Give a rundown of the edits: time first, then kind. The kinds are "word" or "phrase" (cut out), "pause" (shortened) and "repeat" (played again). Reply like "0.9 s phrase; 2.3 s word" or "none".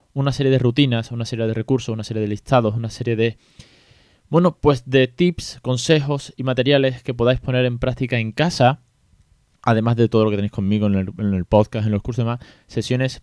none